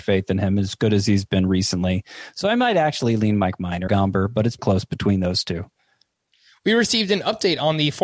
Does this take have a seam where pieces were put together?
yes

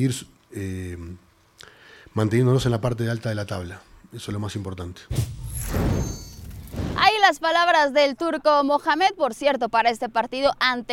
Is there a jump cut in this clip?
no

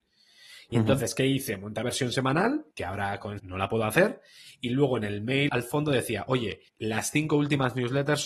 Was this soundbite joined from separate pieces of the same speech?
yes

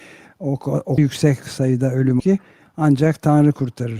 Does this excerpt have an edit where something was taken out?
yes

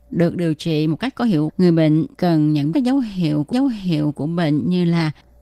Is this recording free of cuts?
no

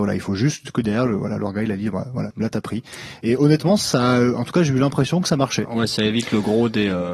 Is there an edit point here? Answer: yes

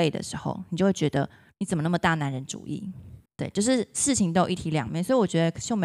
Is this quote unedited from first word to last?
no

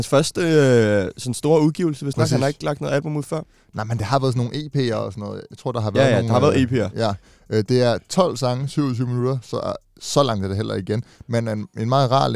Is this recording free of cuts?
yes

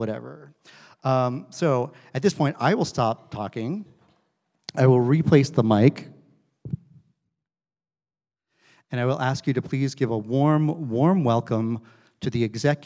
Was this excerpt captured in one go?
yes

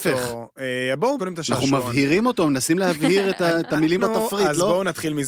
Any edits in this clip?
yes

